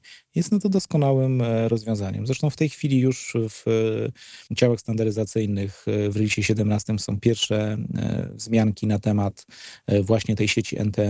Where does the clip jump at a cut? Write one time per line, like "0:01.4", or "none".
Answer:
0:04.5